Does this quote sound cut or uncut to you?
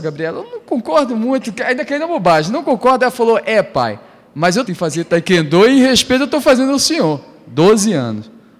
cut